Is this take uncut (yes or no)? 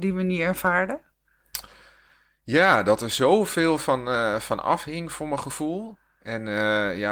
yes